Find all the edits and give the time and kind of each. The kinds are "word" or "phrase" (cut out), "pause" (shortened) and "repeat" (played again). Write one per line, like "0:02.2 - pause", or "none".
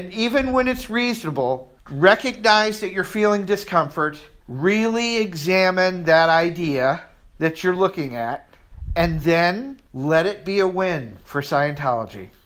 none